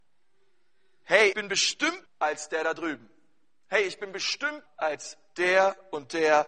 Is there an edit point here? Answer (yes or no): yes